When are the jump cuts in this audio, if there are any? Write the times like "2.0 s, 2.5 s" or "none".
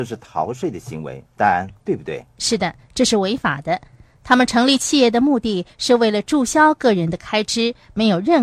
1.3 s